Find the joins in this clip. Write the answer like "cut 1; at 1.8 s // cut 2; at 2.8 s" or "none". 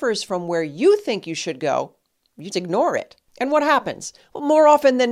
cut 1; at 2.5 s